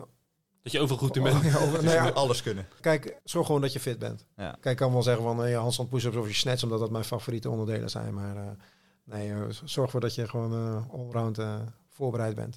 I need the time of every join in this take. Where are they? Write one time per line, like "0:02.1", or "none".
none